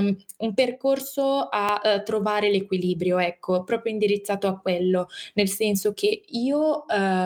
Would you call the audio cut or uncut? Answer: uncut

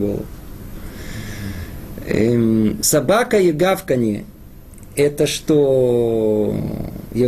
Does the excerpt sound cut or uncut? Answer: uncut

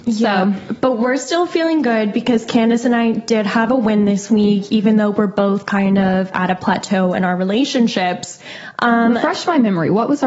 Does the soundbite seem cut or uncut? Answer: uncut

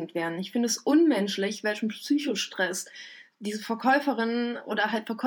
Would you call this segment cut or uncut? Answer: uncut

